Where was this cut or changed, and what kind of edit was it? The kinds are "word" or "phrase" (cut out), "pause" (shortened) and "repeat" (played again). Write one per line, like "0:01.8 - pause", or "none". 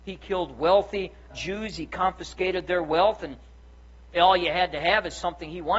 0:01.3 - word
0:04.1 - word

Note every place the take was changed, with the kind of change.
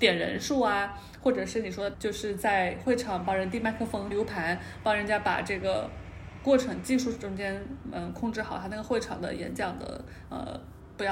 0:01.9 - word
0:04.1 - word

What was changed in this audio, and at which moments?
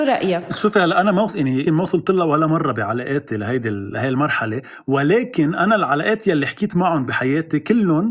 0:01.7 - word

